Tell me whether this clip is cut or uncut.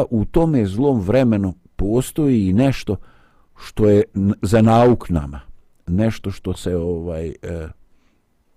uncut